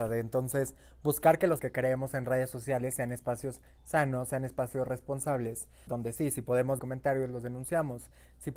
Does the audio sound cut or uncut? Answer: cut